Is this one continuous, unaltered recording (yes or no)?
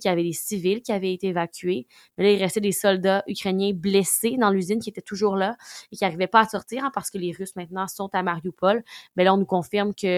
yes